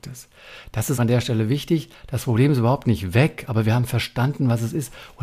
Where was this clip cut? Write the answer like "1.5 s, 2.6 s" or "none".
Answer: 1.0 s